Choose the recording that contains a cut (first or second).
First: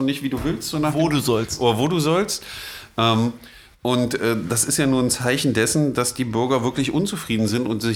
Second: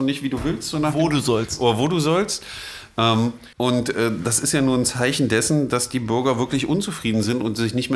second